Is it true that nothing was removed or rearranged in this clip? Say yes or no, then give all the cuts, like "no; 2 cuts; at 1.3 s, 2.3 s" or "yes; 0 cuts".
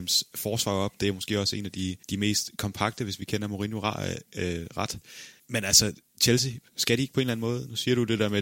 no; 2 cuts; at 2.0 s, 5.4 s